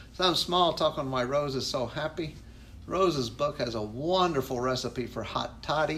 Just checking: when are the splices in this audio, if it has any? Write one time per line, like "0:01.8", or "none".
none